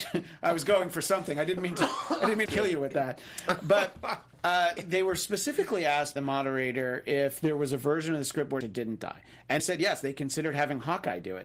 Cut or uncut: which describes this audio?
cut